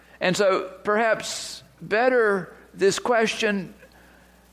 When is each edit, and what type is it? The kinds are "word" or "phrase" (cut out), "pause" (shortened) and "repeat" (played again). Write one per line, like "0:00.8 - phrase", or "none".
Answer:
none